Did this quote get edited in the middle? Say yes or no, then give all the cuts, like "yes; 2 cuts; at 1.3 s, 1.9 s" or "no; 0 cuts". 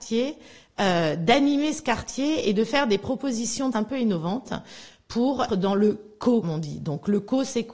yes; 3 cuts; at 3.7 s, 5.5 s, 6.4 s